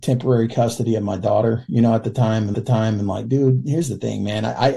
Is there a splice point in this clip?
yes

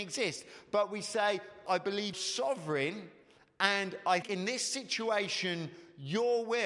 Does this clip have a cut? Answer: yes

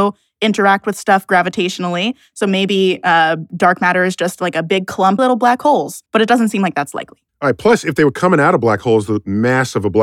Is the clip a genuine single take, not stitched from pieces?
no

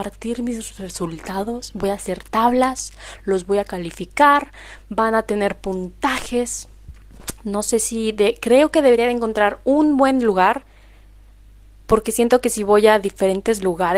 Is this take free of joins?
yes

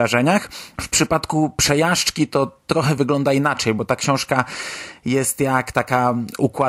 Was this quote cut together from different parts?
no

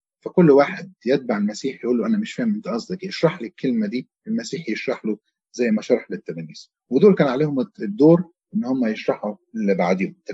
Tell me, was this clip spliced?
no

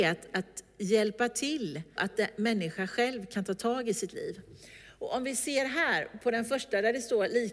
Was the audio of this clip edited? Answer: yes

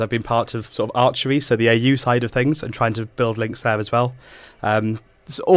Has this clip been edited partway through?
no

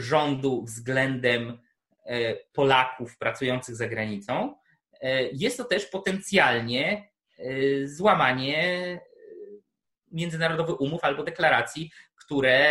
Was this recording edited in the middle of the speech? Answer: no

